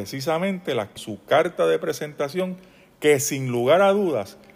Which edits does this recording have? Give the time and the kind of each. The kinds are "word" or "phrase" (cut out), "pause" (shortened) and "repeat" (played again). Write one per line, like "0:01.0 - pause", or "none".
0:01.0 - phrase

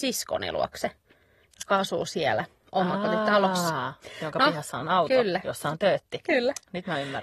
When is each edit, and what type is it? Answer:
none

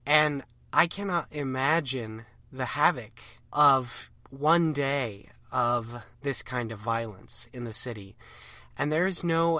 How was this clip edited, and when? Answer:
0:03.4 - pause
0:06.1 - pause

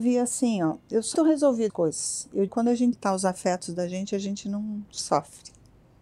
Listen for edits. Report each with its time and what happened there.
0:01.1 - word
0:01.7 - word
0:02.5 - word
0:02.9 - phrase

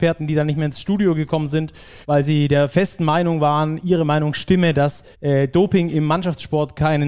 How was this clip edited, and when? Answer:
0:02.0 - pause
0:05.1 - pause

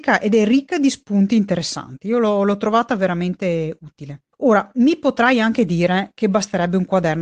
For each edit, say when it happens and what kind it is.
0:04.3 - pause

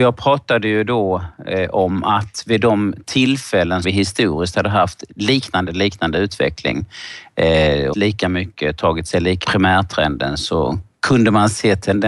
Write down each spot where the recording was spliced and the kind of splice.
0:03.8 - word
0:05.7 - word
0:07.9 - phrase
0:09.4 - phrase

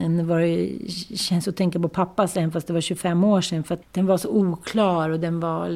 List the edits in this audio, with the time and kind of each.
0:03.8 - word

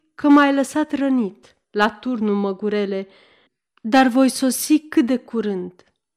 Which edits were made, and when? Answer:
0:01.6 - pause
0:03.5 - pause

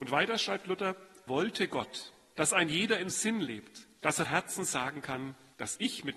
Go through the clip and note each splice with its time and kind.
0:01.3 - word
0:03.1 - word
0:04.2 - word

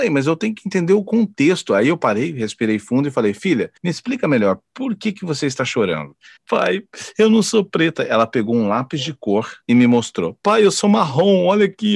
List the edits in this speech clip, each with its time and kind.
0:03.8 - pause
0:06.4 - pause
0:09.6 - pause

